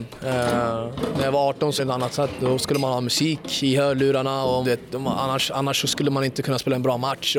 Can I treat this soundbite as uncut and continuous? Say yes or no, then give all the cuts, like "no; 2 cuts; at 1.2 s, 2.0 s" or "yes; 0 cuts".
no; 2 cuts; at 1.8 s, 4.6 s